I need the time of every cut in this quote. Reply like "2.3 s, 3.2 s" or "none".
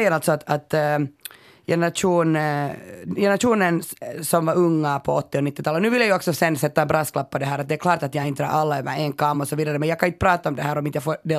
none